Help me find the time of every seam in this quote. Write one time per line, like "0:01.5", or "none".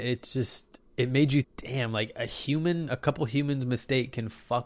0:01.4
0:02.9

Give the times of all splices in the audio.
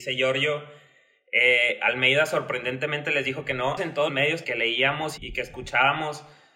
0:03.8
0:04.1
0:04.4
0:05.2

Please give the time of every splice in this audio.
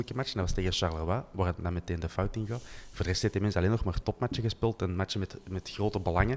none

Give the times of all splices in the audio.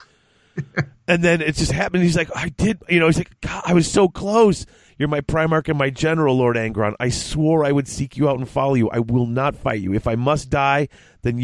none

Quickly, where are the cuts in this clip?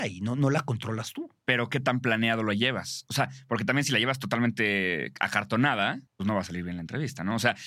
0:01.4
0:06.1

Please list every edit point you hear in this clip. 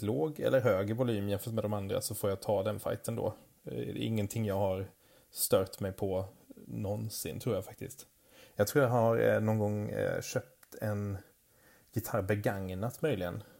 none

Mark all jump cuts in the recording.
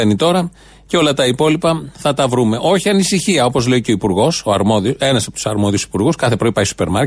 none

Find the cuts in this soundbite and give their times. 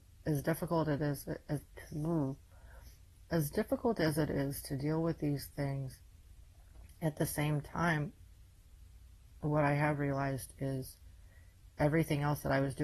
none

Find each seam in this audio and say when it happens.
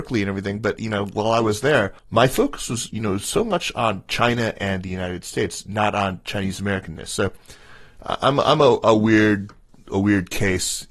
0:02.0

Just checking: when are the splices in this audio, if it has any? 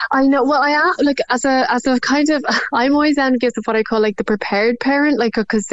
none

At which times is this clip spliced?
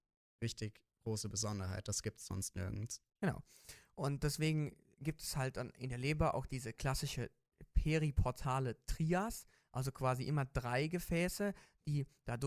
none

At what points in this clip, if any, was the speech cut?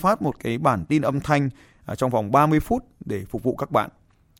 none

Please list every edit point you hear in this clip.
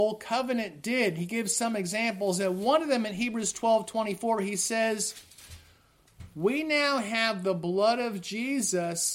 none

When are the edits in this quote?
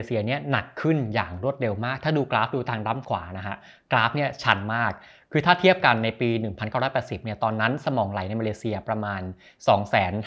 none

